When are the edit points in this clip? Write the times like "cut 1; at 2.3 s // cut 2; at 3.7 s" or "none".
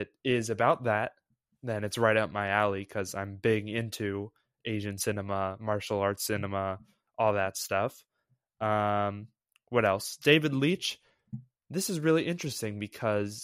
none